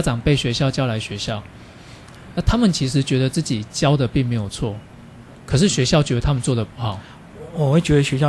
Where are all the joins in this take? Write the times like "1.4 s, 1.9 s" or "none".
none